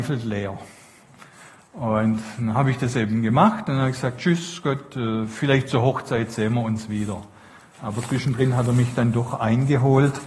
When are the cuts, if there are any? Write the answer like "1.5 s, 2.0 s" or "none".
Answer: none